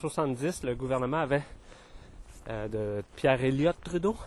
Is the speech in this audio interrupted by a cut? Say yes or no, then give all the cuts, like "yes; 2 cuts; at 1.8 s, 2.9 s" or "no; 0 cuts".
no; 0 cuts